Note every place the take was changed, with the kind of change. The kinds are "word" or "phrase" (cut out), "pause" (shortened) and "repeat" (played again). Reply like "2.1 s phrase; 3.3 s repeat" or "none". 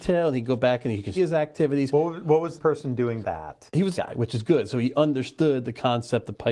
1.2 s word; 2.6 s word; 3.2 s word; 3.9 s word